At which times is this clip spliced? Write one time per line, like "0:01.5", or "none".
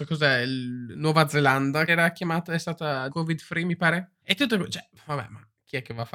0:01.9
0:03.1
0:04.2